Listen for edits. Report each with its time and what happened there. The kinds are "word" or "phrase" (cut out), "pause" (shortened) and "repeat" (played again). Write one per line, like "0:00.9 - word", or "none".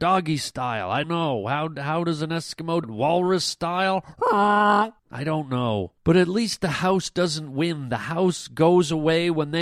0:01.0 - word
0:02.8 - word
0:05.0 - pause
0:06.0 - pause